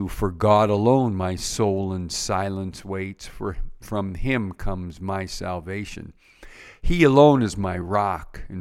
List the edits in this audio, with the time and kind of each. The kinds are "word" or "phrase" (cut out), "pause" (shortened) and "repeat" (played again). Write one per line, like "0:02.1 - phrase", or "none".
none